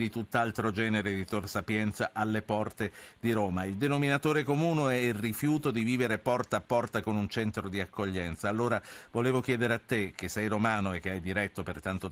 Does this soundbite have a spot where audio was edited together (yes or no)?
no